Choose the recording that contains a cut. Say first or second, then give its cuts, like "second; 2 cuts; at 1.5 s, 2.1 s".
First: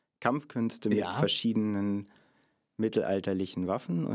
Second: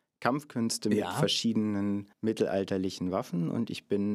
second; 1 cut; at 2.1 s